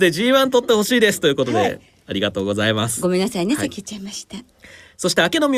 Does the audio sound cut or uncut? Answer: uncut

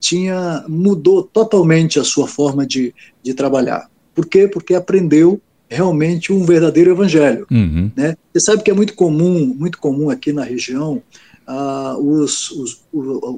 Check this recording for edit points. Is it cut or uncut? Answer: uncut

